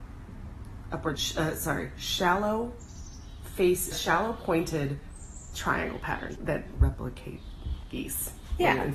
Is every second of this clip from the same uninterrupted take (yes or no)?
no